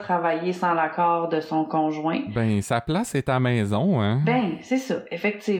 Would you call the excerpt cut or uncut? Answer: uncut